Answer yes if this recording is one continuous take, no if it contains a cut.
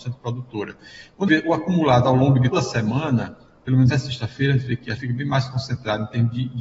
no